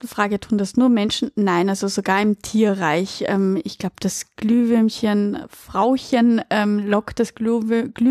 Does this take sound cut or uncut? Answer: uncut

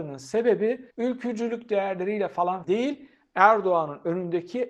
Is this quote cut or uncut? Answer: cut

